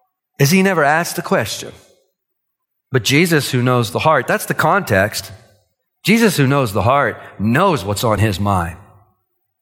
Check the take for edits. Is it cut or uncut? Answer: uncut